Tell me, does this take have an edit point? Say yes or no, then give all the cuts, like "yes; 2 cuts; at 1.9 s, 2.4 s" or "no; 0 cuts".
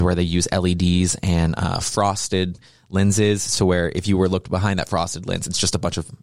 no; 0 cuts